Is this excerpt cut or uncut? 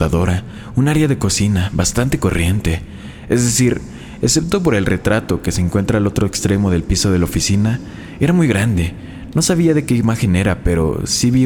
uncut